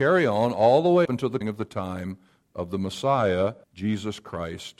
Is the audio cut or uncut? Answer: cut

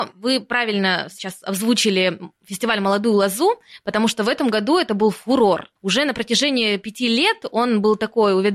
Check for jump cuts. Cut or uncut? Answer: cut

